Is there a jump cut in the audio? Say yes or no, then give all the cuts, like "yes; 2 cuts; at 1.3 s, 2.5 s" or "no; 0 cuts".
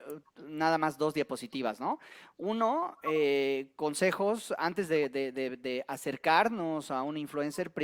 no; 0 cuts